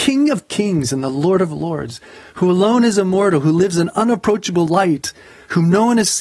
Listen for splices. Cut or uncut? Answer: uncut